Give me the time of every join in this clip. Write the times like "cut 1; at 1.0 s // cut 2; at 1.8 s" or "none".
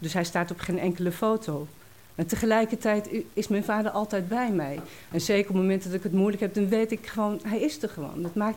none